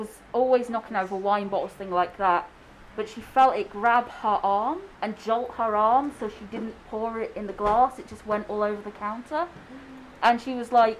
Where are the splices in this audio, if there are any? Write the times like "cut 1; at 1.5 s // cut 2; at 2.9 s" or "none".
cut 1; at 2.9 s // cut 2; at 4.9 s